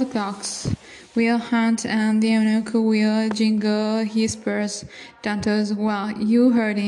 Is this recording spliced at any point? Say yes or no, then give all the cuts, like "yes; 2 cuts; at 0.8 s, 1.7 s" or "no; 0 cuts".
no; 0 cuts